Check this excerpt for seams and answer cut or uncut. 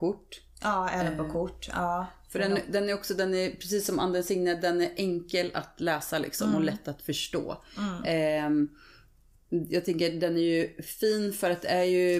uncut